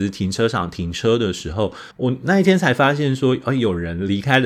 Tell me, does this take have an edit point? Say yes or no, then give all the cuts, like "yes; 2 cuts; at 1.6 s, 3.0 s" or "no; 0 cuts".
yes; 1 cut; at 1.9 s